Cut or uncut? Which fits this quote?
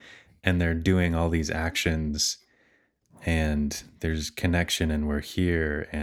uncut